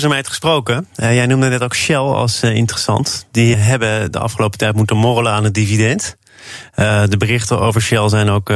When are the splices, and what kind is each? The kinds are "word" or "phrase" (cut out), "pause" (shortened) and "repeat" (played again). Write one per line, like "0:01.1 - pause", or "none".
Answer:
0:03.5 - word

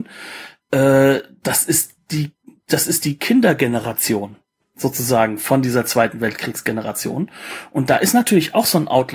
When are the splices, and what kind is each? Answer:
none

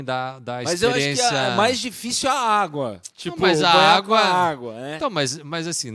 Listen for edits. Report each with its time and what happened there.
0:03.1 - pause

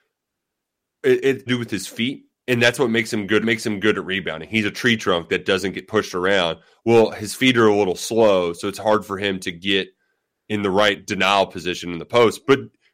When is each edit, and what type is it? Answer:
0:01.5 - phrase
0:03.4 - repeat

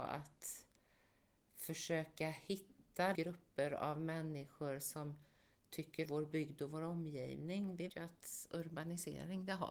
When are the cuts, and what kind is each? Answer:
0:03.1 - word
0:06.0 - word
0:07.9 - word

